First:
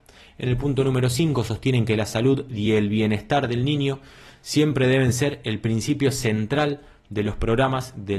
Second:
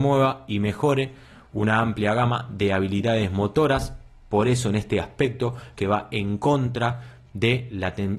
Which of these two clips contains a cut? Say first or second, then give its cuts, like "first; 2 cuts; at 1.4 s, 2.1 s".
second; 1 cut; at 5.7 s